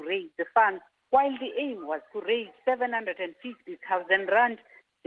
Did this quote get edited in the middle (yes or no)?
yes